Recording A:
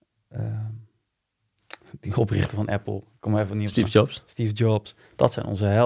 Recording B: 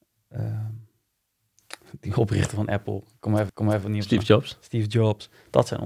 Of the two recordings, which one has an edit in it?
B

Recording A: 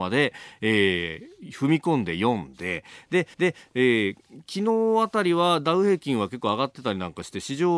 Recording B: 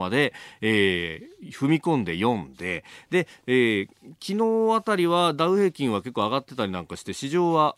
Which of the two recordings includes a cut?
A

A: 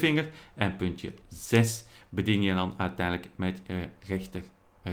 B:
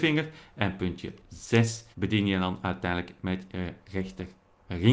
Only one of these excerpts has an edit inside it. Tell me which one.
B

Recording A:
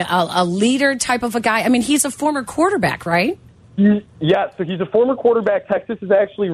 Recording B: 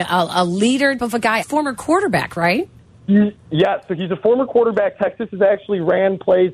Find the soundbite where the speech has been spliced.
B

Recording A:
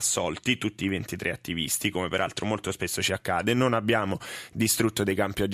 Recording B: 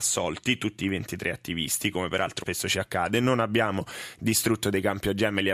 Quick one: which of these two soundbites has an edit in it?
B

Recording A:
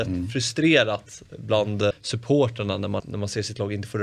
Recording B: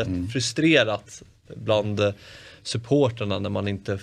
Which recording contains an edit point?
A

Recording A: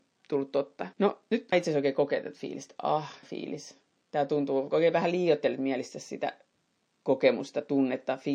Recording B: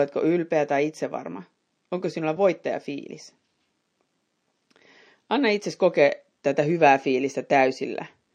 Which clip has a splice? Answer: A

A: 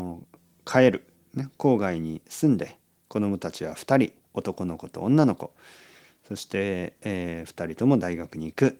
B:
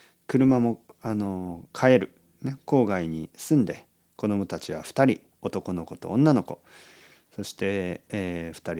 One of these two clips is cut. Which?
B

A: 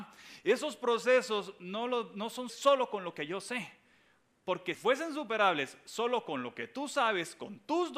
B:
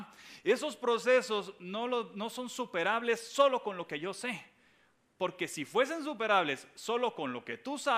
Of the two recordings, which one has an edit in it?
A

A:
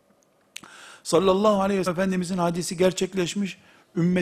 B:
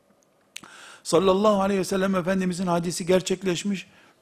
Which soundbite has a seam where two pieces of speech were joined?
A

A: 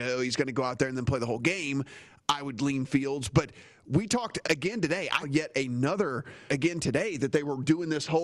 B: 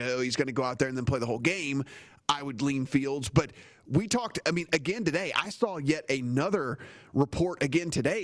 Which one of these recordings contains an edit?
A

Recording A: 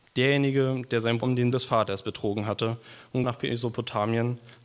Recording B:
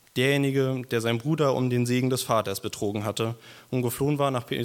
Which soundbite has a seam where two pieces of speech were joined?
A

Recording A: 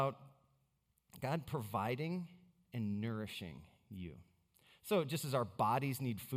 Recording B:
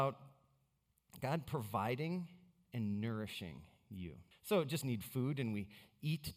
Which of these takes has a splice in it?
B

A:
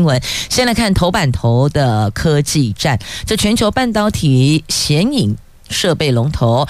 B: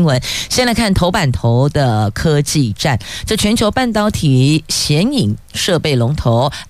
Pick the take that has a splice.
B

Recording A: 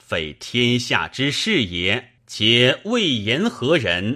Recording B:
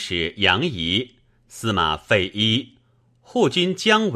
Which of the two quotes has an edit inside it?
A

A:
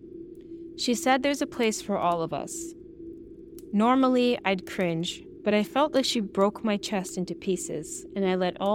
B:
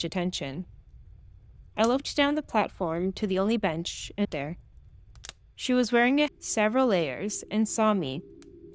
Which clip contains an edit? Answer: B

